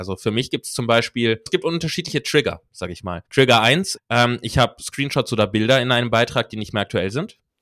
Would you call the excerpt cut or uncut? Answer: cut